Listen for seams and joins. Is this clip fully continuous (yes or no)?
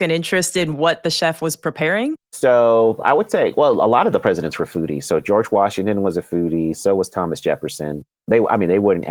no